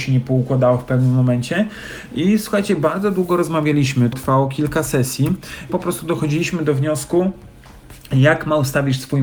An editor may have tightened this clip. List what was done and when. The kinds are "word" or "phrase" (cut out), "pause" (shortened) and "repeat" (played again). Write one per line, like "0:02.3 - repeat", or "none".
0:04.1 - word
0:05.7 - word

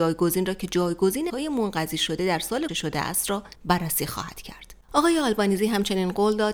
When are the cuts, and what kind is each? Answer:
0:01.3 - word
0:02.7 - word
0:03.5 - pause
0:04.8 - pause

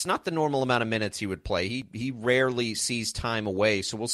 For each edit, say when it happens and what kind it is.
none

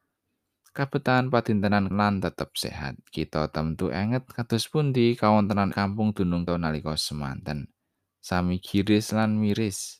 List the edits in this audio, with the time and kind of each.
0:01.9 - word
0:03.1 - pause
0:05.7 - word
0:06.5 - word
0:08.0 - pause

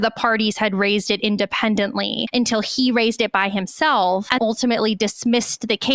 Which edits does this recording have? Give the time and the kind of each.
0:04.4 - word

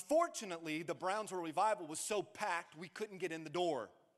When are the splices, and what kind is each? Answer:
none

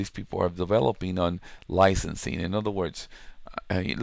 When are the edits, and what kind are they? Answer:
none

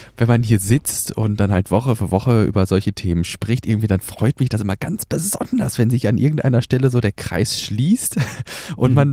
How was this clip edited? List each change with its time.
none

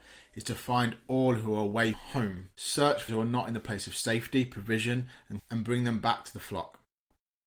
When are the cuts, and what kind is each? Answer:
0:01.9 - word
0:02.5 - pause
0:03.1 - word
0:05.4 - word

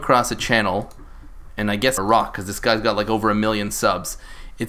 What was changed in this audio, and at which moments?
0:02.0 - phrase

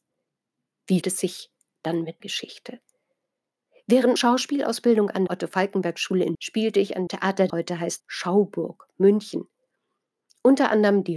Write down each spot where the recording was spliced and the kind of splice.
0:01.0 - word
0:02.2 - word
0:04.2 - word
0:05.3 - word
0:06.3 - word
0:07.1 - word
0:07.5 - word
0:08.0 - word

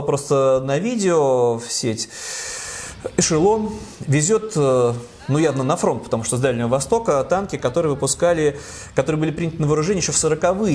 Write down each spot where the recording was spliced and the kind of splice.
none

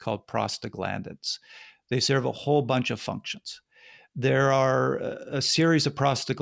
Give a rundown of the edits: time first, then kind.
none

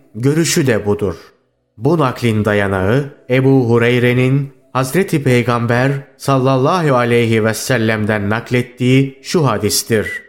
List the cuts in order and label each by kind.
none

